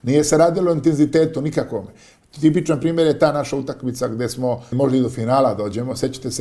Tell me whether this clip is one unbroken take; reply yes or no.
no